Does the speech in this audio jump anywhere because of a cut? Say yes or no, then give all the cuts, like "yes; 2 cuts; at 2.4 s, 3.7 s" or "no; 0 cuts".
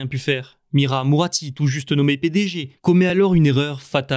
no; 0 cuts